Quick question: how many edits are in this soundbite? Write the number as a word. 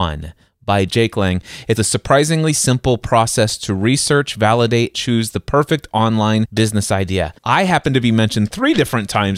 three